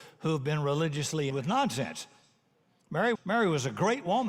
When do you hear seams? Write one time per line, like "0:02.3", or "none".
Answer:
0:01.3
0:03.2